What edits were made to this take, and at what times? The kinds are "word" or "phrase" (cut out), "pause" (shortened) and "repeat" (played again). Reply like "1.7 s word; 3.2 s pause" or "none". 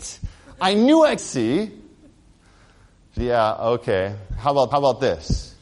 1.2 s word; 3.2 s word; 4.7 s repeat